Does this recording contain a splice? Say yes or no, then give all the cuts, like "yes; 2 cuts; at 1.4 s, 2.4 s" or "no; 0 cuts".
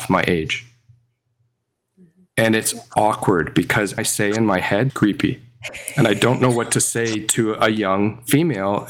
yes; 2 cuts; at 4.0 s, 4.9 s